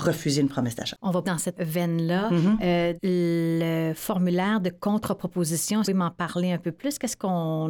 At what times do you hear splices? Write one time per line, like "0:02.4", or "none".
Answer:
0:01.2
0:01.5
0:03.0
0:05.8